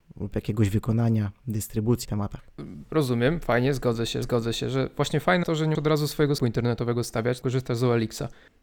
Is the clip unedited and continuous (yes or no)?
no